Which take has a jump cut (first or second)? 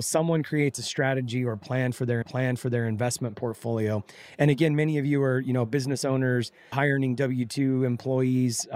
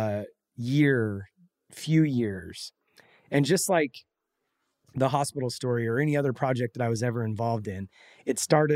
first